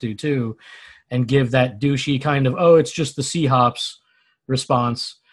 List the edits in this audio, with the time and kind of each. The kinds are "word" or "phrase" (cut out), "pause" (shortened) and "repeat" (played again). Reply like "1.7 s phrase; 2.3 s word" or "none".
none